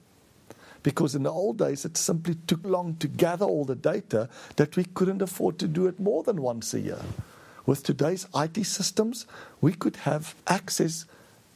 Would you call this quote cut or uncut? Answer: cut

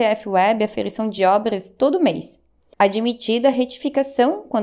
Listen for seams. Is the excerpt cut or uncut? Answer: uncut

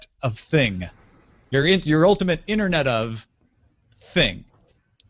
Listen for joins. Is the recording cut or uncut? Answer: uncut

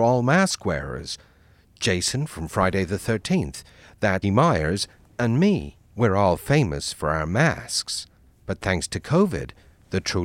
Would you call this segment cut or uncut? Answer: cut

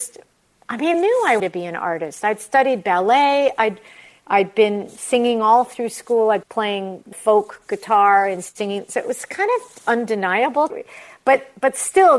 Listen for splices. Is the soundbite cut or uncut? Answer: cut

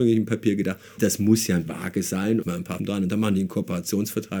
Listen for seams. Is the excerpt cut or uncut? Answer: cut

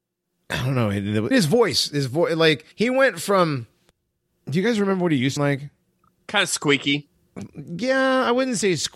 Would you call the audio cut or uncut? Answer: cut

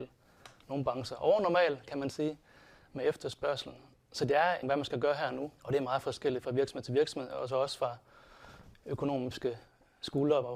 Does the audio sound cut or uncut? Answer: cut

